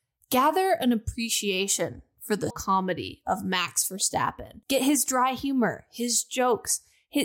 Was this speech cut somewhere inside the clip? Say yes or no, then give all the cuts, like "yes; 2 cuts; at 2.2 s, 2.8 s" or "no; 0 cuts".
yes; 2 cuts; at 2.5 s, 4.6 s